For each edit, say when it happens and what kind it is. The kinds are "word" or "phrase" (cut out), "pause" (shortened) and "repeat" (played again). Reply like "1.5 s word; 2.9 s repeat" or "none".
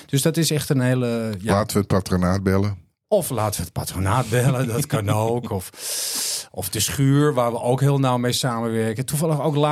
none